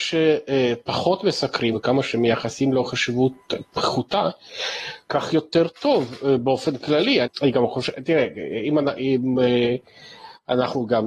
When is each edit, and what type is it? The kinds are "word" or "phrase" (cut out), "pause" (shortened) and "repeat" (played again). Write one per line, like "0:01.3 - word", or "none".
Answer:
0:01.7 - word
0:07.2 - phrase